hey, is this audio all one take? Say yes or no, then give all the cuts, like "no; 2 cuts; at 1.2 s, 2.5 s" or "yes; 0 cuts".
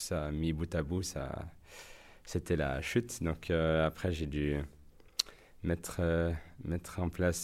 yes; 0 cuts